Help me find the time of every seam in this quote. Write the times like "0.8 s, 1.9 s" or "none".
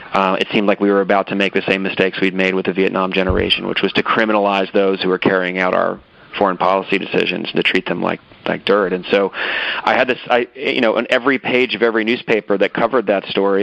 none